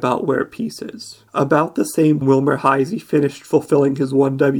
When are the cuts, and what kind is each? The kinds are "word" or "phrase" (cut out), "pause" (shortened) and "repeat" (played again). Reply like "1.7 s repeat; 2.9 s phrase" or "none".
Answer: 1.3 s pause; 2.2 s word